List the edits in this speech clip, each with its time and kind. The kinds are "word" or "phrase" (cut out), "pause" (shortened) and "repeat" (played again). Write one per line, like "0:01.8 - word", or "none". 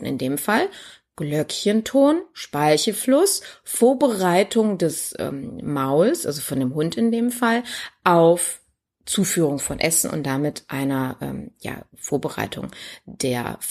none